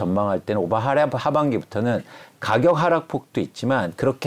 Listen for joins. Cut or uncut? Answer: uncut